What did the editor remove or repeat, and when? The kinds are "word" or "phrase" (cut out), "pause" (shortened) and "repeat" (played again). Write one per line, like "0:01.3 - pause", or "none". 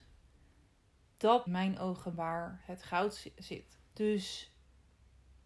0:01.5 - phrase
0:02.6 - word
0:03.9 - pause

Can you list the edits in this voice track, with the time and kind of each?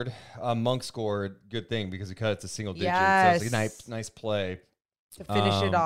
none

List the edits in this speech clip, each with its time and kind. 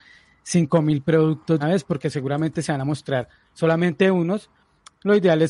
0:01.6 - word

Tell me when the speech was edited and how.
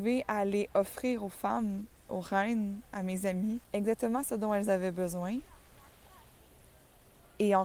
0:03.6 - pause

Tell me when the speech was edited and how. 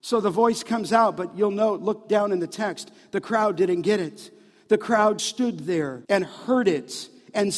0:05.2 - word
0:06.0 - pause

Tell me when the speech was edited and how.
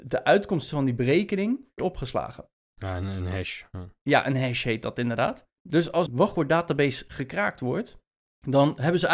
0:01.8 - phrase
0:06.1 - word

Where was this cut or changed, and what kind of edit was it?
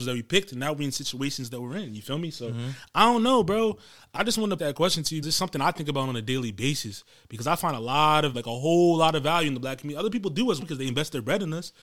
0:04.2 - word
0:04.6 - word
0:05.2 - word
0:08.3 - word
0:10.6 - word

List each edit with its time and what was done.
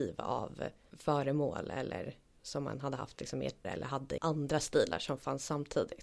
0:02.3 - word
0:03.6 - word
0:04.2 - word

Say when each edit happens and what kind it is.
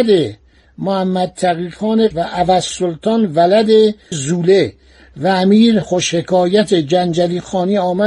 0:02.1 - word
0:04.1 - word
0:05.8 - word

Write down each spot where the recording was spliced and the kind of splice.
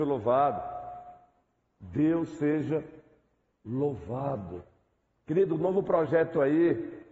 none

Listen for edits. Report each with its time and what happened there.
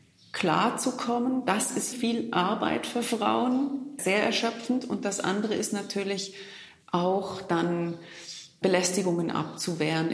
0:01.9 - word

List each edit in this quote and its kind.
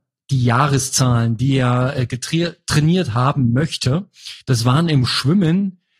0:04.4 - pause

